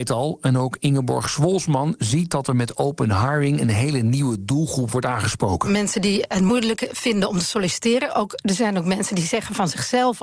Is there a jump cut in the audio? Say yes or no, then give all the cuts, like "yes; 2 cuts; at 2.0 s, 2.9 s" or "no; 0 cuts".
no; 0 cuts